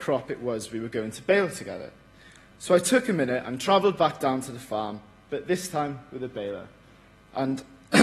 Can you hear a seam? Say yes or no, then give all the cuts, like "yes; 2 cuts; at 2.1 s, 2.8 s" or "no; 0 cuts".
no; 0 cuts